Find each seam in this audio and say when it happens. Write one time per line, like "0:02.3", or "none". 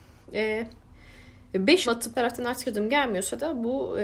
0:01.8
0:02.1
0:02.6